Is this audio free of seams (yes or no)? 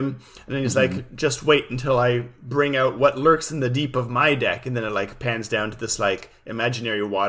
yes